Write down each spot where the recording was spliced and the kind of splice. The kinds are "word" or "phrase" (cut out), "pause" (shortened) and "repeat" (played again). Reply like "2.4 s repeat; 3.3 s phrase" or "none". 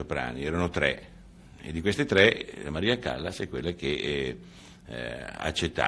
none